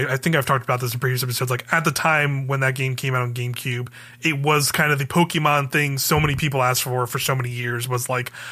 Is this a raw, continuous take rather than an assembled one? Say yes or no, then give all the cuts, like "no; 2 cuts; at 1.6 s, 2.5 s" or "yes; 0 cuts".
yes; 0 cuts